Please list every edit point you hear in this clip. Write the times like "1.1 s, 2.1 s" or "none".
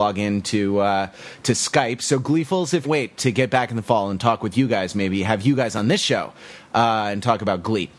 2.8 s